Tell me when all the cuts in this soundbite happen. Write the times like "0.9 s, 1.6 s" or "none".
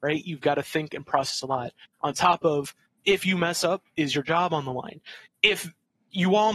none